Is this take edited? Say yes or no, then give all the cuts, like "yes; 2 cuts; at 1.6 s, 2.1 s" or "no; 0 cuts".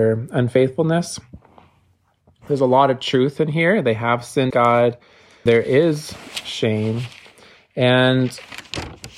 yes; 2 cuts; at 4.5 s, 5.5 s